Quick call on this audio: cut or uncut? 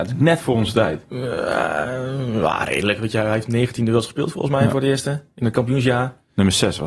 uncut